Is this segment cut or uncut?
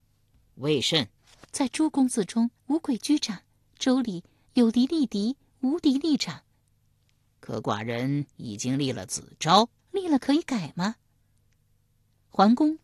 cut